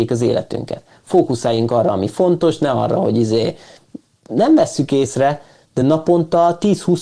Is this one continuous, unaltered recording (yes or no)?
yes